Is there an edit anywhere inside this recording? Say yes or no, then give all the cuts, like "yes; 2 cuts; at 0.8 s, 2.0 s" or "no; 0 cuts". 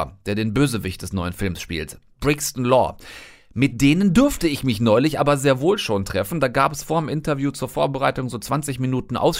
no; 0 cuts